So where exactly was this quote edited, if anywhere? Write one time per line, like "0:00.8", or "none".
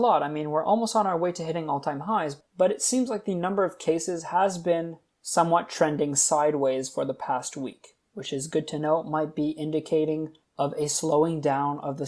none